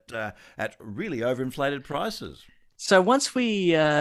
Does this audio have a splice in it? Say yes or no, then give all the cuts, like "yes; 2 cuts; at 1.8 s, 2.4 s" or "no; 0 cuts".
no; 0 cuts